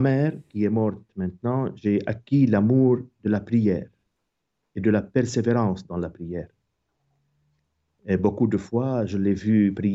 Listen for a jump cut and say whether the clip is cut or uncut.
uncut